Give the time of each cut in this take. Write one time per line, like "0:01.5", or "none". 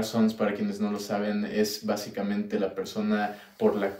none